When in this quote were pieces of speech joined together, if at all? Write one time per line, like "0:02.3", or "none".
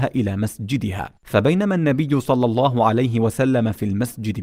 0:01.2